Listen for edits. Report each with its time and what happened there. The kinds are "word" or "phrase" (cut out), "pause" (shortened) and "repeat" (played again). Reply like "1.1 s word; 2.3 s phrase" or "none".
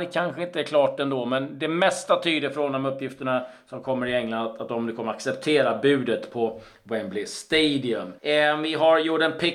8.2 s pause